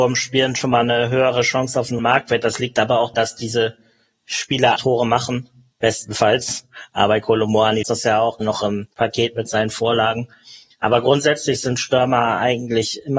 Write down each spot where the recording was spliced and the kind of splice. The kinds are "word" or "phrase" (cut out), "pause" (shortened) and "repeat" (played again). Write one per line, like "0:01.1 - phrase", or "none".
0:02.0 - word
0:03.1 - word
0:04.8 - word
0:07.8 - word
0:08.4 - word